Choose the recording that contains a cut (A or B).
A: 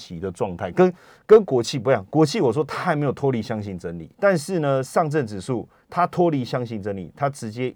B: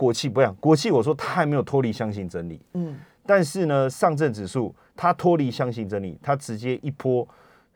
A